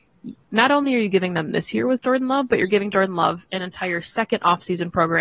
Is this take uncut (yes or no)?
yes